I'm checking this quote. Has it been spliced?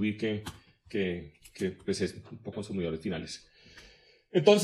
yes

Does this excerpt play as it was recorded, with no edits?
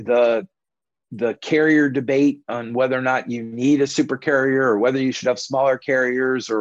yes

